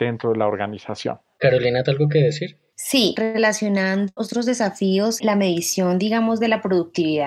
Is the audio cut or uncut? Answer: cut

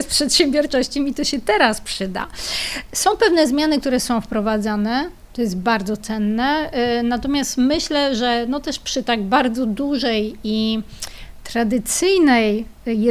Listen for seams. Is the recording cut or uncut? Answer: uncut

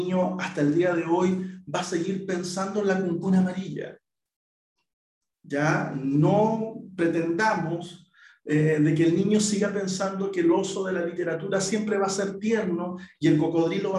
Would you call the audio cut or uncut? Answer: uncut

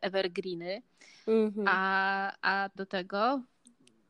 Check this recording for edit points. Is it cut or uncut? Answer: cut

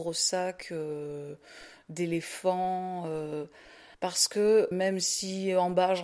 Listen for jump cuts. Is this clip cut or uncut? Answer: cut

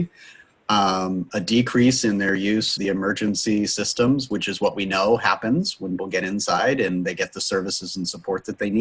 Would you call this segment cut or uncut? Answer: cut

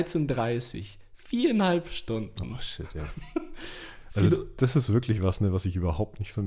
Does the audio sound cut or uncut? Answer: uncut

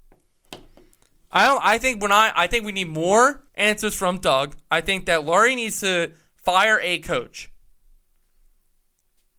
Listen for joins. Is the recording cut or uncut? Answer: cut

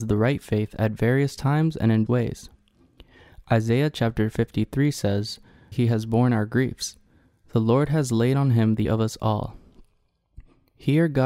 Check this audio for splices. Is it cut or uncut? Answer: cut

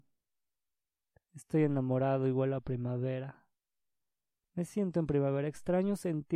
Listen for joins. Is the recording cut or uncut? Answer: uncut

